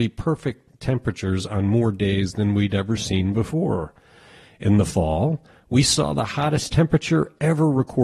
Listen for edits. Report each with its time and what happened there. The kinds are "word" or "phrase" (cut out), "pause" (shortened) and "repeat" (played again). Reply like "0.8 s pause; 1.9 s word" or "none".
none